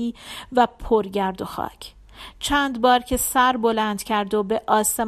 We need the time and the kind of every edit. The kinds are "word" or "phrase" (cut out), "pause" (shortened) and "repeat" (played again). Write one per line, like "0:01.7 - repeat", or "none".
none